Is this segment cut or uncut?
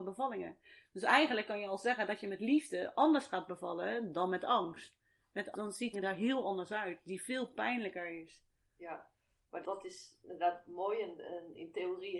cut